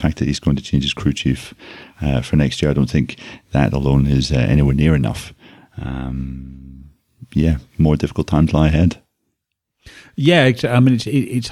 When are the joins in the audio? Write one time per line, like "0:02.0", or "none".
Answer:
none